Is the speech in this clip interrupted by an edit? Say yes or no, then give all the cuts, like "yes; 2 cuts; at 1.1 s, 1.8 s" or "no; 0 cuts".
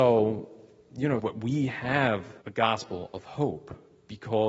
yes; 2 cuts; at 1.2 s, 2.4 s